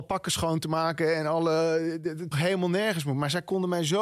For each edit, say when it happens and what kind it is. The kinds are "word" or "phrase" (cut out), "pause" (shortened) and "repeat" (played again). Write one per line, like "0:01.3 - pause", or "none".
0:02.3 - word